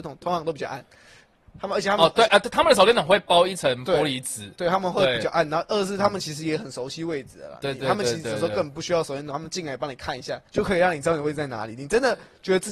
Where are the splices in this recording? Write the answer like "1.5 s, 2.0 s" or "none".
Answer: 10.5 s

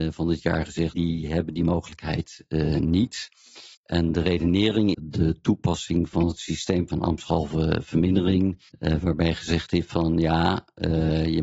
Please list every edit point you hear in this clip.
0.9 s, 3.7 s, 4.9 s, 8.7 s

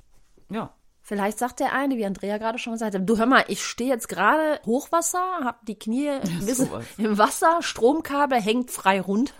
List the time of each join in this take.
4.6 s

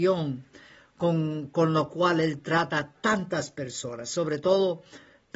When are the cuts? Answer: none

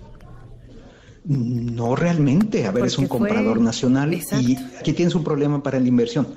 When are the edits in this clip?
4.8 s

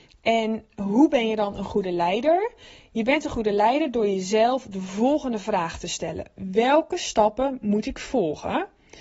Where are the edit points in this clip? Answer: none

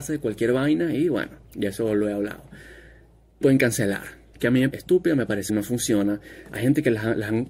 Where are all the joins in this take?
1.4 s, 3.4 s, 4.3 s, 4.7 s, 5.5 s

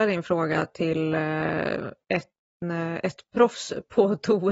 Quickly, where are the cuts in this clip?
none

